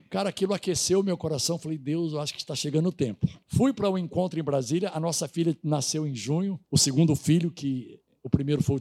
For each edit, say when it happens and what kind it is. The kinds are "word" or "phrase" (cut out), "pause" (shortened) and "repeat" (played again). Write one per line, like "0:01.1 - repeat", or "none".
0:03.4 - pause
0:06.6 - pause